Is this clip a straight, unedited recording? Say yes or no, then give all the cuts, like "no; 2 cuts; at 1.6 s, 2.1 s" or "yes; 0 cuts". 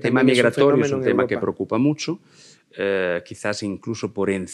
yes; 0 cuts